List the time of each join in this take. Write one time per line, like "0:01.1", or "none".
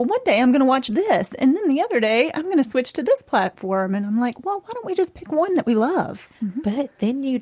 0:06.4